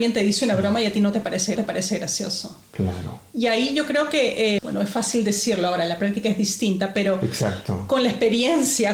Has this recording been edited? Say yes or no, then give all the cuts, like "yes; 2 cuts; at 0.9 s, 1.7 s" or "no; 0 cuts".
yes; 2 cuts; at 1.6 s, 4.6 s